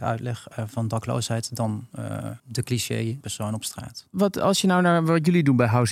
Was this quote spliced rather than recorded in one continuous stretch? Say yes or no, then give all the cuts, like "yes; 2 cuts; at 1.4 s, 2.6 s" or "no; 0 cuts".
yes; 2 cuts; at 2.4 s, 3.2 s